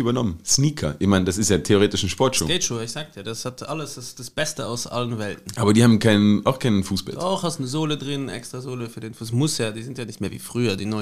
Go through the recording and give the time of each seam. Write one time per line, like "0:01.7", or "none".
none